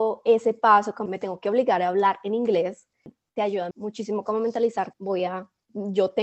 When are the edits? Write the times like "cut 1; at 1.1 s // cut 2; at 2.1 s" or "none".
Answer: cut 1; at 1.1 s // cut 2; at 3.7 s // cut 3; at 4.9 s